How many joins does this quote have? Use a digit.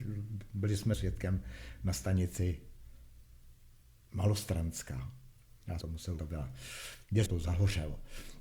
5